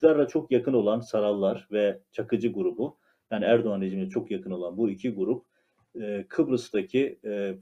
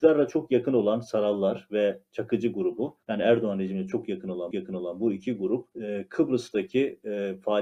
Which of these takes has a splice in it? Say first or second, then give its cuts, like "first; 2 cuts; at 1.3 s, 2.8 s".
second; 3 cuts; at 3.0 s, 4.5 s, 5.7 s